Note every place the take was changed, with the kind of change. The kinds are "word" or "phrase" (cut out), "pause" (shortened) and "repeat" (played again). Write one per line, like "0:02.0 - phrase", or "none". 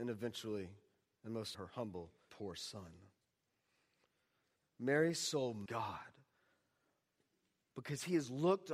0:01.5 - word
0:02.3 - word
0:05.7 - word